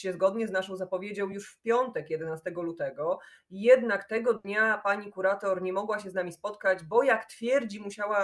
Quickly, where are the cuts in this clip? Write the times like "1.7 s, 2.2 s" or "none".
none